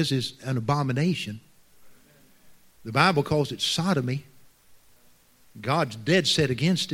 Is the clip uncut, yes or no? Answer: yes